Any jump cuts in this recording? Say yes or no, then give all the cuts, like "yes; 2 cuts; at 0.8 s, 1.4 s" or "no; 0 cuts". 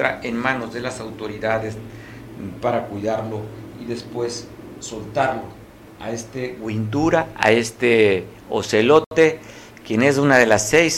no; 0 cuts